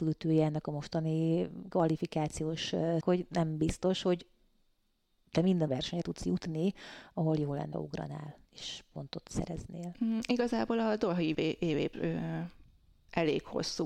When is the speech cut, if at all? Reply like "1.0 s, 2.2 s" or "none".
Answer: 3.0 s, 5.7 s, 6.0 s, 7.7 s, 11.3 s, 11.9 s